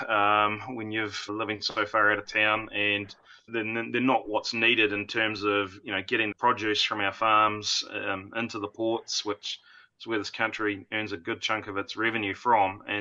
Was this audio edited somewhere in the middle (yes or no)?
yes